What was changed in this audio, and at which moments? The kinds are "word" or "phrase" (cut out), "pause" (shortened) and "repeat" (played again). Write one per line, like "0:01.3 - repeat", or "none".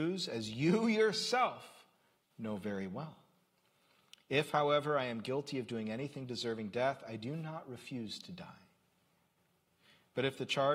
none